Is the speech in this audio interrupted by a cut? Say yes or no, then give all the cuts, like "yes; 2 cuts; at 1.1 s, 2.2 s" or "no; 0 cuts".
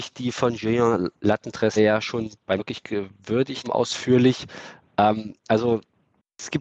yes; 3 cuts; at 1.8 s, 2.6 s, 3.6 s